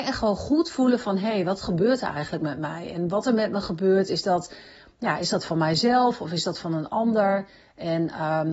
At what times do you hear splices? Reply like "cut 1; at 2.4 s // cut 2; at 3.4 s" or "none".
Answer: none